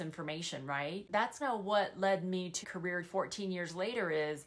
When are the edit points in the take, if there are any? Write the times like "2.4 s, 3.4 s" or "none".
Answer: 1.4 s, 2.6 s, 3.0 s